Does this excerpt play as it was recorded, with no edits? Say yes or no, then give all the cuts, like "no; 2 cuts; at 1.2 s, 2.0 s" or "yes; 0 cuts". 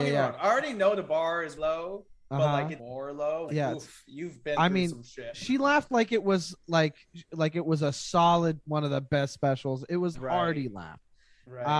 no; 5 cuts; at 1.6 s, 2.8 s, 3.5 s, 8.6 s, 10.1 s